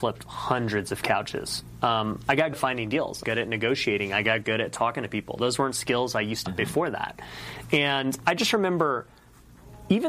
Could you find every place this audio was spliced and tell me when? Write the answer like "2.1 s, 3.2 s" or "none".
2.5 s, 3.2 s, 6.5 s